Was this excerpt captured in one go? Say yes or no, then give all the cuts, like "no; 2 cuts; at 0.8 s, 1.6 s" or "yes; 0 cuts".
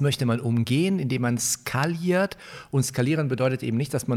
yes; 0 cuts